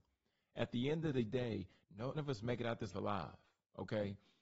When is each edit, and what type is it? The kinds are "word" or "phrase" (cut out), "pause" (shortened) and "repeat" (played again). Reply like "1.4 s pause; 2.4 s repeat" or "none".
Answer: 2.1 s word; 2.9 s word

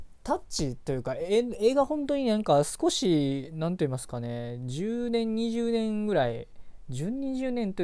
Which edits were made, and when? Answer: none

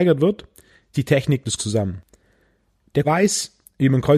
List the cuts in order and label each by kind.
0.9 s word; 1.6 s word; 3.0 s word

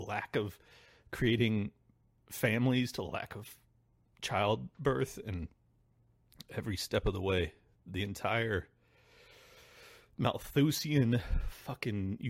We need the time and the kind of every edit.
none

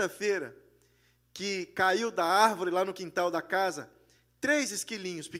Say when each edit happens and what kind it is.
none

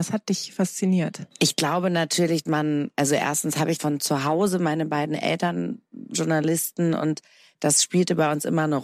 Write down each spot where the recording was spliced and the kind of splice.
2.5 s word; 3.8 s word; 6.1 s word

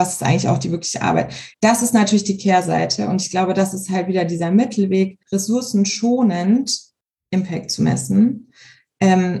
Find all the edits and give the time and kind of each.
1.5 s pause; 5.2 s pause

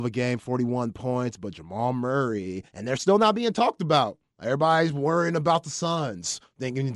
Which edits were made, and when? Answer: 2.7 s pause

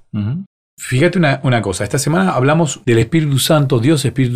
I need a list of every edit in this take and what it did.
none

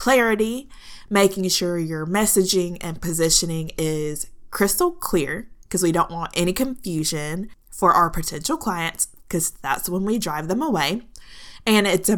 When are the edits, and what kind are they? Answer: none

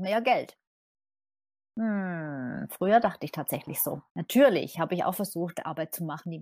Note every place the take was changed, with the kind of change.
4.1 s pause

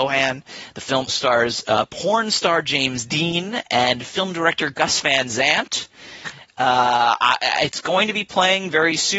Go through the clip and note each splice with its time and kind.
1.1 s word

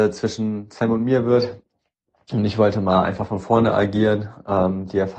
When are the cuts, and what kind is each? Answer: none

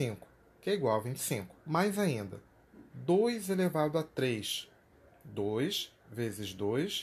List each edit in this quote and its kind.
1.6 s pause

